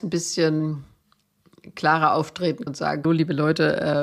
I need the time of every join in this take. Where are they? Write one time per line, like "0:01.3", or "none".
0:02.7
0:03.0

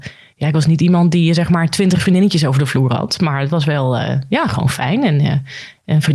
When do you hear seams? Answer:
none

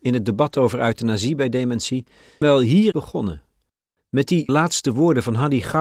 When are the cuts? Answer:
0:02.4
0:02.9
0:04.5

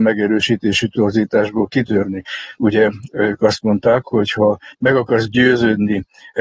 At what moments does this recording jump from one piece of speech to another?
0:04.7

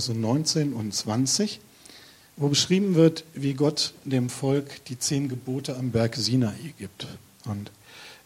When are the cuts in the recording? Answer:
none

